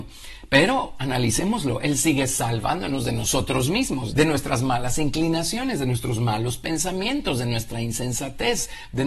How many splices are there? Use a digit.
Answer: 1